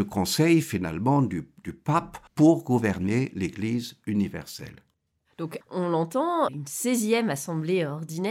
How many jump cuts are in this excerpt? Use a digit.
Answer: 3